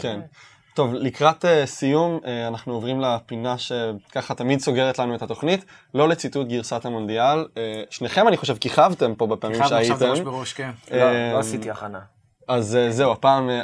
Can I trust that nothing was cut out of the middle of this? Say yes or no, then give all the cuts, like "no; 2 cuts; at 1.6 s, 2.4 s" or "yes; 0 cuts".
yes; 0 cuts